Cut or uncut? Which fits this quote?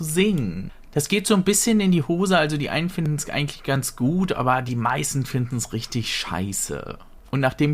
uncut